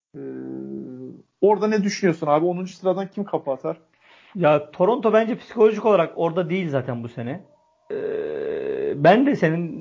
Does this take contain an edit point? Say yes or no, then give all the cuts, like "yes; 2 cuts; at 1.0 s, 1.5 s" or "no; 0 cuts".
no; 0 cuts